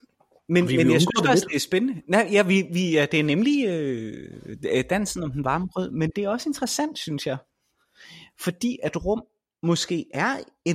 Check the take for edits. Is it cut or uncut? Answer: uncut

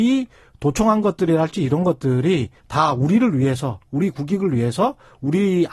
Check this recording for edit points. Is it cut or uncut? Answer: cut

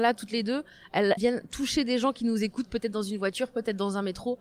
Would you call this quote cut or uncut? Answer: cut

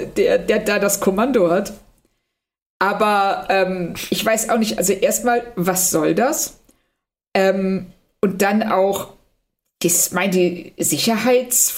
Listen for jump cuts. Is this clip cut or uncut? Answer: uncut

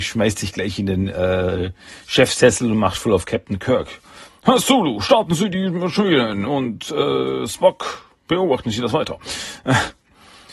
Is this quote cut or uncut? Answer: uncut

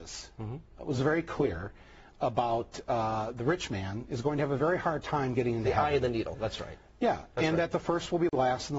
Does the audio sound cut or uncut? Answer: uncut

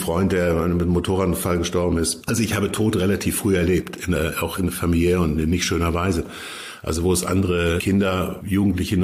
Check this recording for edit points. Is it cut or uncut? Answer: uncut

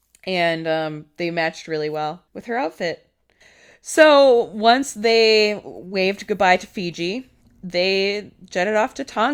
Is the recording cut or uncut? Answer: cut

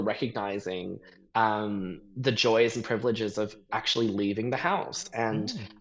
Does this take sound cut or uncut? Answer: uncut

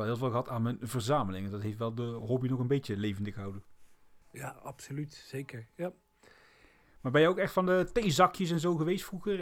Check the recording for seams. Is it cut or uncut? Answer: cut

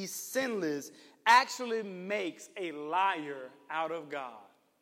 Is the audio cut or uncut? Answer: uncut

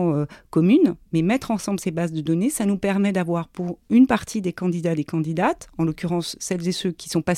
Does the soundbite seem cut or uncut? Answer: uncut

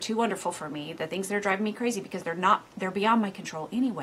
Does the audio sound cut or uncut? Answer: uncut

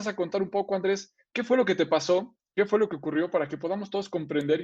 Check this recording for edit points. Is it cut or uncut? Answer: uncut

